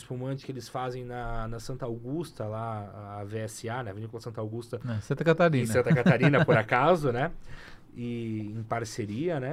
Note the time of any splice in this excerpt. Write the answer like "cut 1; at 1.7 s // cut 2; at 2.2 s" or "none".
none